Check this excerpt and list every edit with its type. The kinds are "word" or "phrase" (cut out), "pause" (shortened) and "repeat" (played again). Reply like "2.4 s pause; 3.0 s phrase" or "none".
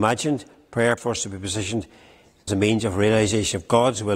1.0 s word; 2.5 s word